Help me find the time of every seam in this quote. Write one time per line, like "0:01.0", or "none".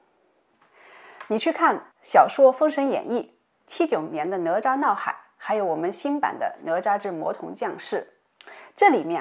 0:01.9